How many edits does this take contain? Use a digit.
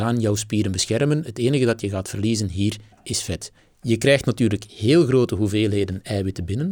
3